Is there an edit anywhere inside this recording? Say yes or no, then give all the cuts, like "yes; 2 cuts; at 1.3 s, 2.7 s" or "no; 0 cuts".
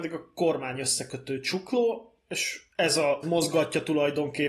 yes; 1 cut; at 3.2 s